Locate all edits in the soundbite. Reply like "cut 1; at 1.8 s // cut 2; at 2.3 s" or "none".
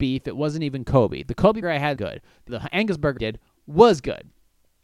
cut 1; at 1.6 s // cut 2; at 2.0 s // cut 3; at 2.5 s // cut 4; at 3.2 s

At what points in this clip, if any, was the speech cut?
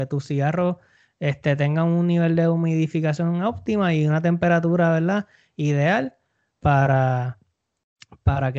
none

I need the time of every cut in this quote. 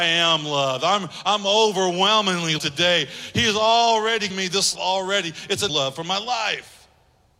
cut 1; at 2.6 s // cut 2; at 4.3 s // cut 3; at 4.7 s // cut 4; at 5.7 s

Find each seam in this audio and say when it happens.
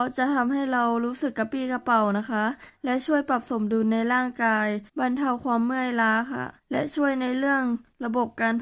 cut 1; at 4.9 s // cut 2; at 6.6 s

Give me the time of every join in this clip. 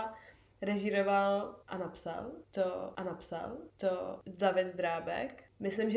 cut 1; at 3.0 s

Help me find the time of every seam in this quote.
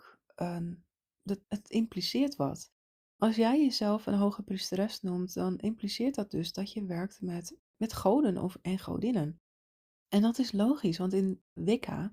cut 1; at 1.4 s // cut 2; at 7.6 s

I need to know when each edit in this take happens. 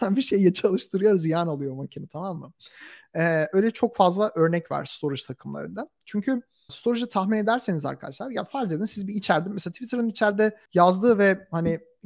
cut 1; at 6.7 s // cut 2; at 10.7 s

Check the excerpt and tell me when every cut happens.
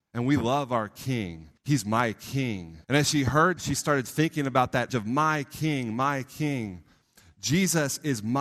cut 1; at 1.6 s // cut 2; at 2.8 s // cut 3; at 3.6 s // cut 4; at 4.9 s

